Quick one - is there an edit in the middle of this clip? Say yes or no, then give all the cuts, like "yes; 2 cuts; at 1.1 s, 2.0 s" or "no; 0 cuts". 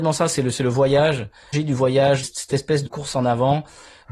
yes; 3 cuts; at 1.5 s, 2.2 s, 2.9 s